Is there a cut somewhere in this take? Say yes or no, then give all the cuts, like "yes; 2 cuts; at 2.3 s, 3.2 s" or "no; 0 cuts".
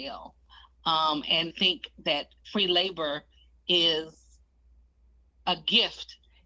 yes; 2 cuts; at 1.5 s, 2.4 s